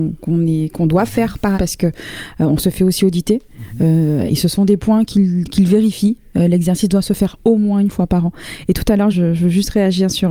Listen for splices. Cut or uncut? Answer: cut